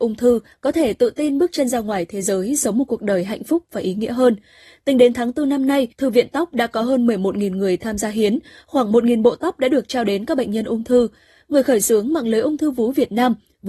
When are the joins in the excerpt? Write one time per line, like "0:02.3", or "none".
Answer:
0:05.9